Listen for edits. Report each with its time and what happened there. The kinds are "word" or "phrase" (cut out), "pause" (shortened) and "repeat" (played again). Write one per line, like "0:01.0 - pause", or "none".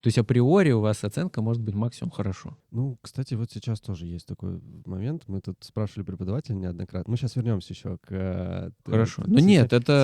0:02.6 - pause